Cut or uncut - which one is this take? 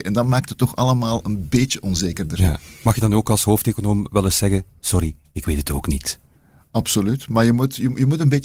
uncut